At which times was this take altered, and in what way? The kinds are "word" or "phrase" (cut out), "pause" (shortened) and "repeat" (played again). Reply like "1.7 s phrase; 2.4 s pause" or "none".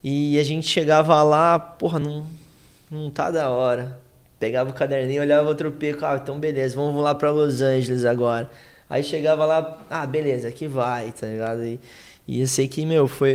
none